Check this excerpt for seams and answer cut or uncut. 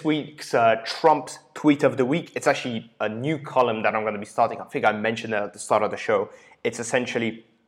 uncut